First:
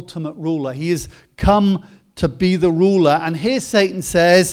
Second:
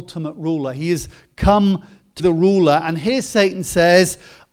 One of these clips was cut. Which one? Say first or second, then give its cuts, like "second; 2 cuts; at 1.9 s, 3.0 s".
second; 1 cut; at 2.2 s